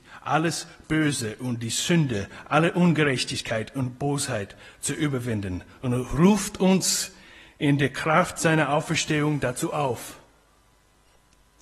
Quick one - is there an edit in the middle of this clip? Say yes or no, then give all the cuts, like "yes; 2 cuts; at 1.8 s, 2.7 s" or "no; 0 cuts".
no; 0 cuts